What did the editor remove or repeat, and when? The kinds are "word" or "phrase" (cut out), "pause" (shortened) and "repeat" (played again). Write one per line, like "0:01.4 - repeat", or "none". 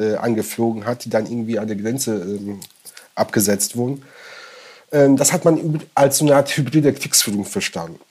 none

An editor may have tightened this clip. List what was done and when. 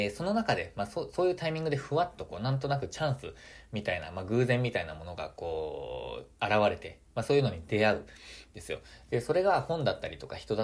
0:06.3 - pause

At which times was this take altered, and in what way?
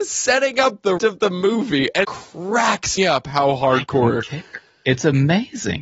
0:01.0 - word
0:02.0 - word
0:03.0 - word

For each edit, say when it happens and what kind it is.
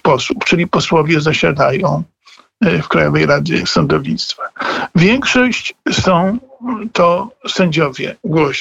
none

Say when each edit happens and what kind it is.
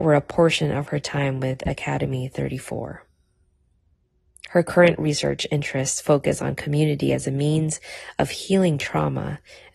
none

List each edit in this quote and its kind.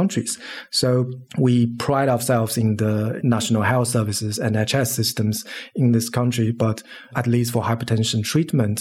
none

